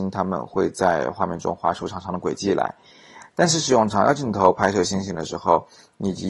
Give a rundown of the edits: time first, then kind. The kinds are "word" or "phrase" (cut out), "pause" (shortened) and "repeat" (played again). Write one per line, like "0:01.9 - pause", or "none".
none